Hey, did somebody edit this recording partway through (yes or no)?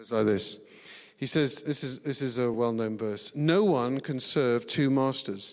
no